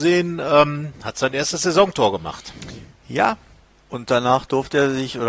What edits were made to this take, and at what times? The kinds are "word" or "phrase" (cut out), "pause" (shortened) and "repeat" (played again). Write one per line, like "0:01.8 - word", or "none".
none